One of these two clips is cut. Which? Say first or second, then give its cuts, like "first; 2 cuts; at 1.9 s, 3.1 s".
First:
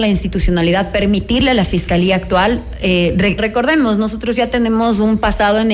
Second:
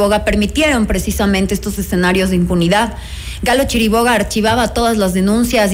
first; 1 cut; at 3.4 s